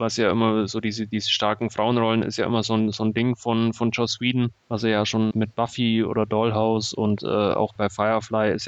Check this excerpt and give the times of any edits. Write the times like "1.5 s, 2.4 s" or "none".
4.6 s, 5.3 s, 7.2 s, 7.8 s